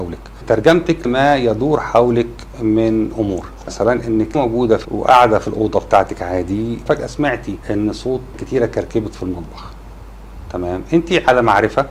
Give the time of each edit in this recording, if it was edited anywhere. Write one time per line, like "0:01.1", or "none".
0:01.0
0:04.3
0:04.8
0:08.3